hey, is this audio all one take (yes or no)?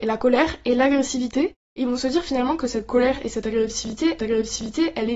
no